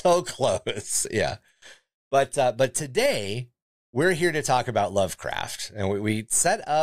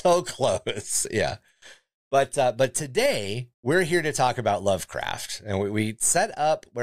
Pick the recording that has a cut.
second; 1 cut; at 3.5 s

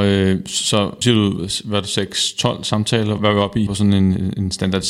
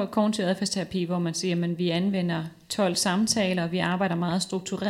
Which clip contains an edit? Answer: first; 3 cuts; at 1.0 s, 3.2 s, 3.7 s

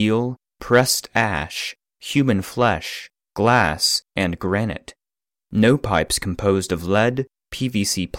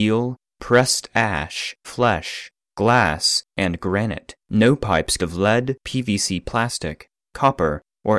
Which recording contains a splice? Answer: second; 4 cuts; at 1.8 s, 4.4 s, 5.2 s, 5.8 s

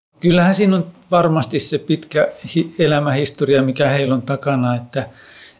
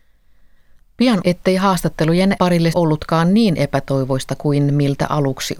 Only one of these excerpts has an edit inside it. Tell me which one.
second; 3 cuts; at 1.2 s, 2.4 s, 2.7 s

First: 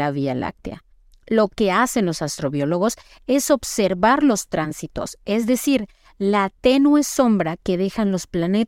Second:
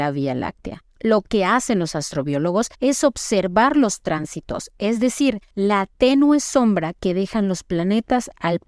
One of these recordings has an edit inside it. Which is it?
second; 3 cuts; at 0.9 s, 2.7 s, 5.5 s

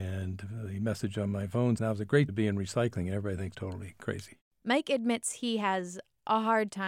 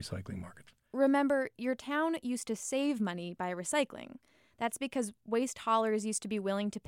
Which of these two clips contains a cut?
first; 3 cuts; at 1.8 s, 2.3 s, 3.5 s

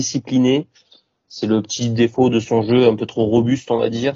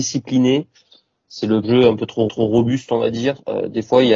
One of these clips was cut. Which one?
second; 2 cuts; at 1.6 s, 2.3 s

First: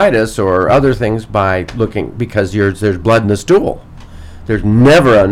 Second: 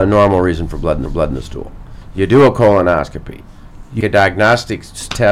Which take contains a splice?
second; 2 cuts; at 1.1 s, 4.0 s

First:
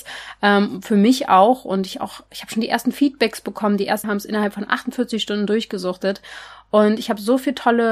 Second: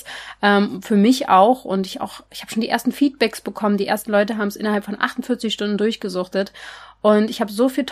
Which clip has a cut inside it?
first; 1 cut; at 4.0 s

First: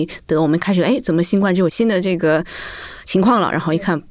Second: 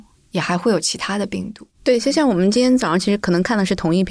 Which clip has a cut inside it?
second; 1 cut; at 1.7 s

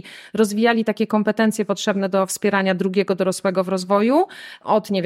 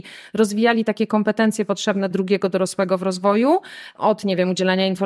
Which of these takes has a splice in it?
second; 1 cut; at 2.1 s

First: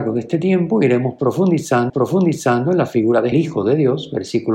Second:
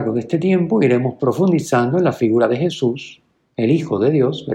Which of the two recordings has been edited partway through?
first; 2 cuts; at 1.9 s, 3.3 s

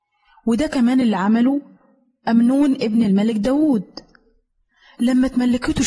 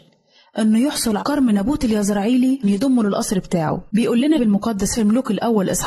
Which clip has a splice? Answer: second; 5 cuts; at 1.2 s, 2.6 s, 3.9 s, 4.4 s, 5.0 s

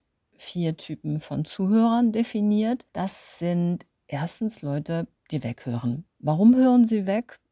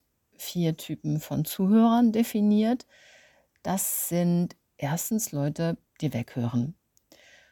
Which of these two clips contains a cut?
first; 2 cuts; at 2.9 s, 6.1 s

